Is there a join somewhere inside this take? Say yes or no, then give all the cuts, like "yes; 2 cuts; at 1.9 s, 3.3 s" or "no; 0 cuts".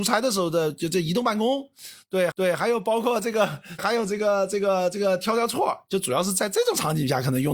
yes; 2 cuts; at 2.3 s, 3.8 s